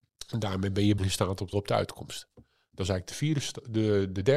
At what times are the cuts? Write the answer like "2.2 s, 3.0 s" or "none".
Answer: 1.0 s, 1.5 s